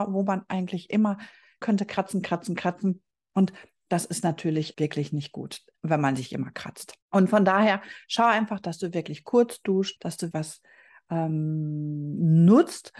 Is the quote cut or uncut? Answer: cut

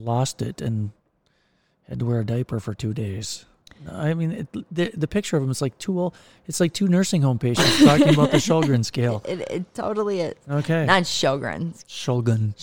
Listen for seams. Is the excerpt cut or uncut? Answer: uncut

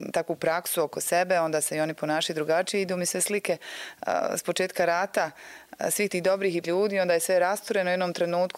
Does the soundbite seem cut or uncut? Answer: cut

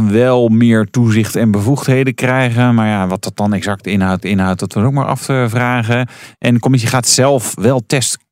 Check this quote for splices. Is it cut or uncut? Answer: cut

